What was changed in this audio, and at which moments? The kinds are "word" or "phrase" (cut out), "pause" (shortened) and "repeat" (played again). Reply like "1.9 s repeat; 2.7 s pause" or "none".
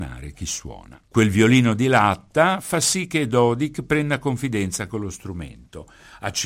1.1 s pause